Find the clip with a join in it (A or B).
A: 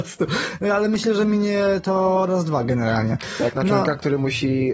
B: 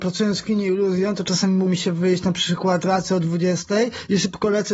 B